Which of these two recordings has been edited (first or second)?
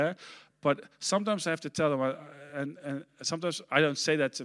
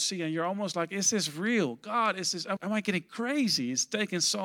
second